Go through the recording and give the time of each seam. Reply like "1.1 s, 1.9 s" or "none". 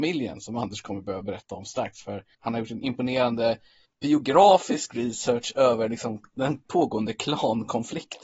2.3 s, 3.8 s